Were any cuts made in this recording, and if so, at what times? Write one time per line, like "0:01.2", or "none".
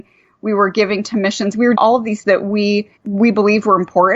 0:01.7
0:02.2
0:03.0